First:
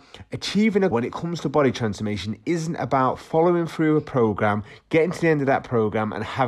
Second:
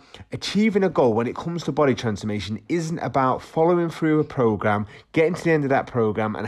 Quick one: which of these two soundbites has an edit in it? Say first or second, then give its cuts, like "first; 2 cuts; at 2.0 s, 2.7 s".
first; 1 cut; at 0.9 s